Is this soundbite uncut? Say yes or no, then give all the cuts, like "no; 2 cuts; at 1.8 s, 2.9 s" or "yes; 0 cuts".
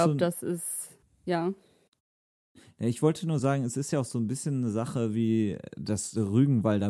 yes; 0 cuts